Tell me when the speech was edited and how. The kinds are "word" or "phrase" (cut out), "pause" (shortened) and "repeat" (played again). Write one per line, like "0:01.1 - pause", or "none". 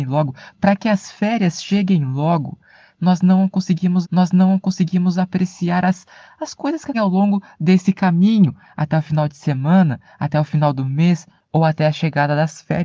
0:04.0 - repeat
0:06.9 - word